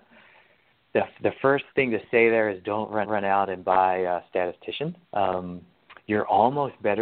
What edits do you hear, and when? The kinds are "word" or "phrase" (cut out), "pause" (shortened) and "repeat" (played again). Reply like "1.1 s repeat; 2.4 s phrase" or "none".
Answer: 1.7 s pause; 3.0 s repeat; 5.0 s pause